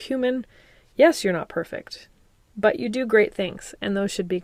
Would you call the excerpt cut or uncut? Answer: uncut